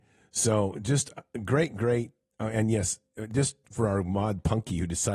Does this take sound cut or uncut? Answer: uncut